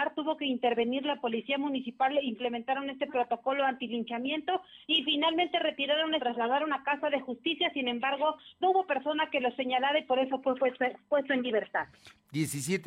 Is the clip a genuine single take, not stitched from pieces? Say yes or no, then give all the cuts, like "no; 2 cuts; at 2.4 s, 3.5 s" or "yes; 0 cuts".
no; 4 cuts; at 4.8 s, 6.2 s, 8.6 s, 10.4 s